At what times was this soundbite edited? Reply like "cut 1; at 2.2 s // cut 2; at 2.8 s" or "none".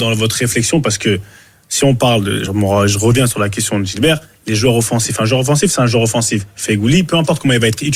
none